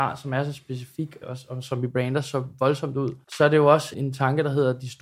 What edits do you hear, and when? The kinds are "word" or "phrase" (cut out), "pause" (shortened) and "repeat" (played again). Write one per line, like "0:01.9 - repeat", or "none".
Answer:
0:01.2 - phrase
0:03.2 - pause
0:03.9 - word